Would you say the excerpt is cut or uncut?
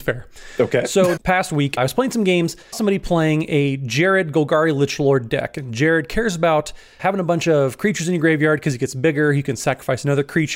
cut